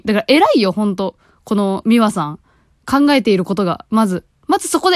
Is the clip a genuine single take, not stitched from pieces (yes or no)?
yes